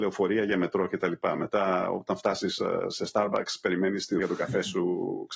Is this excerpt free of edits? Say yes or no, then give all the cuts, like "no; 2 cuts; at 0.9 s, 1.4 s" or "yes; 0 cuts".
no; 1 cut; at 4.2 s